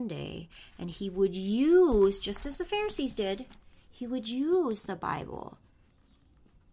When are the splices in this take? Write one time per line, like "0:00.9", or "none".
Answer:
none